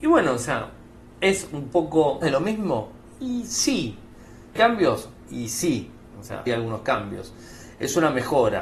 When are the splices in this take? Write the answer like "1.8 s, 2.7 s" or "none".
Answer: 2.2 s, 4.6 s, 6.5 s